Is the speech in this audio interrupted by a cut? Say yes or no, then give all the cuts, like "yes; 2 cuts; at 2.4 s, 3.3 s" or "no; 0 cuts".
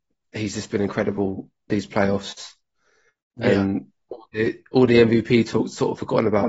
no; 0 cuts